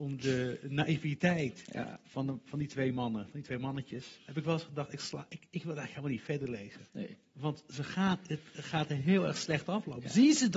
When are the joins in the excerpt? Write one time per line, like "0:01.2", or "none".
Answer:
0:06.9